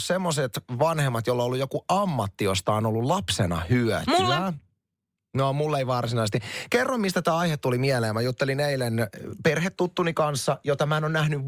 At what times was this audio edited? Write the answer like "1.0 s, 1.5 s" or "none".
none